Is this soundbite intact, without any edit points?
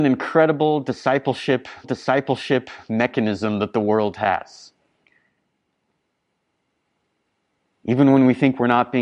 no; 1 cut; at 1.8 s

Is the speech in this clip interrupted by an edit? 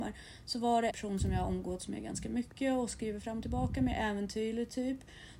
yes; 1 cut; at 0.9 s

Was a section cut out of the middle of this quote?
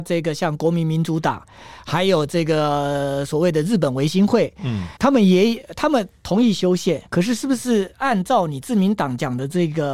yes; 2 cuts; at 5.0 s, 7.1 s

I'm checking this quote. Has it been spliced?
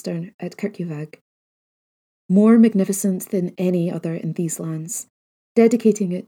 no; 0 cuts

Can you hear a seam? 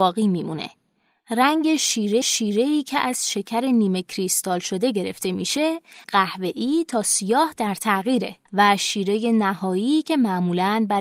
yes; 3 cuts; at 2.2 s, 6.0 s, 8.5 s

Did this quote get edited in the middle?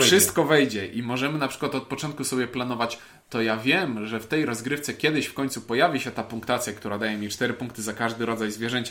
no; 0 cuts

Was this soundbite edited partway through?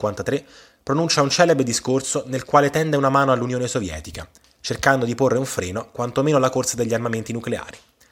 no; 0 cuts

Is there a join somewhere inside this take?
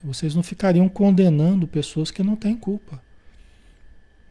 no; 0 cuts

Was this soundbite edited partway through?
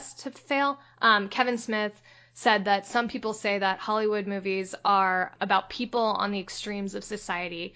no; 0 cuts

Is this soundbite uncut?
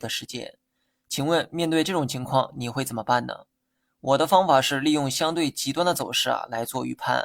yes; 0 cuts

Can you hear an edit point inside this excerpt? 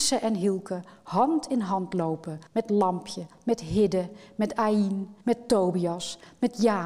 yes; 2 cuts; at 2.5 s, 5.2 s

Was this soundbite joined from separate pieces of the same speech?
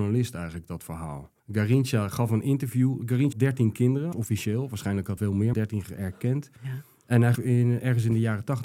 yes; 7 cuts; at 1.4 s, 3.3 s, 4.1 s, 5.2 s, 5.5 s, 6.0 s, 7.4 s

